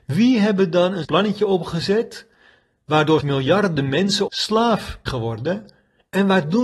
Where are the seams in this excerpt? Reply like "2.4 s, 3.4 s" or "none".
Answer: 1.0 s, 3.2 s, 4.3 s, 5.1 s